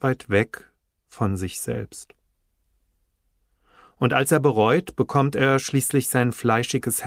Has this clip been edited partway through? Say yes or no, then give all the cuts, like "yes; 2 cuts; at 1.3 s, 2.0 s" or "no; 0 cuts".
no; 0 cuts